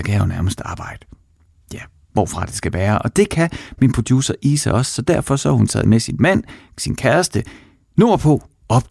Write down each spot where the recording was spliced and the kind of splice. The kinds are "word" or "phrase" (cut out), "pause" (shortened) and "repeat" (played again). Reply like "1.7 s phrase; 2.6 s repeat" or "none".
none